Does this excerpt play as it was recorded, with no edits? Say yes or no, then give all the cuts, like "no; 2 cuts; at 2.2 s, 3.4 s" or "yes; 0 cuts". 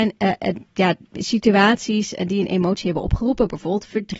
yes; 0 cuts